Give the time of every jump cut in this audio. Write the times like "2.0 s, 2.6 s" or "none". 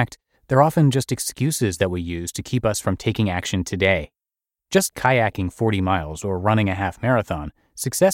4.9 s

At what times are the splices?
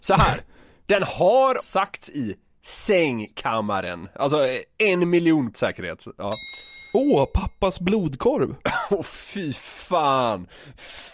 1.6 s, 5.5 s

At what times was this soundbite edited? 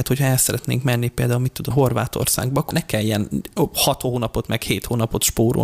1.7 s, 2.7 s

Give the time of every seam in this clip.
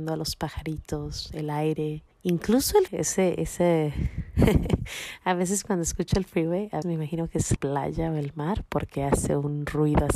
2.1 s, 2.9 s, 3.4 s, 6.8 s, 7.6 s

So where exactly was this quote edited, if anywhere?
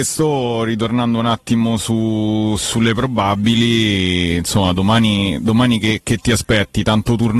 none

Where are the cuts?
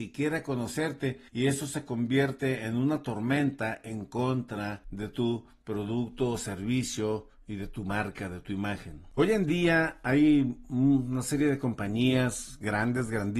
1.3 s, 4.8 s

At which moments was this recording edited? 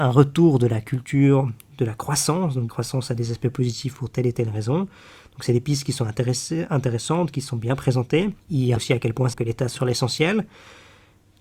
2.7 s, 8.8 s, 9.3 s, 9.8 s

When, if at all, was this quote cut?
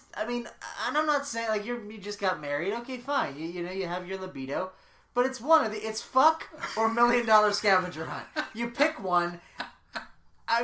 none

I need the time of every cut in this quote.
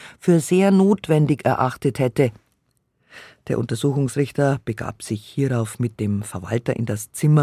none

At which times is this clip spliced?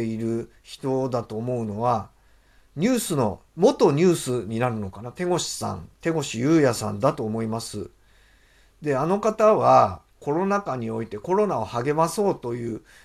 3.5 s, 5.9 s, 10.1 s

